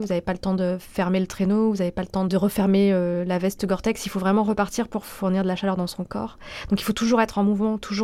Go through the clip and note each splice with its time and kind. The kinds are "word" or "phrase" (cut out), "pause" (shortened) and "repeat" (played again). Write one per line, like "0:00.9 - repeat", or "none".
none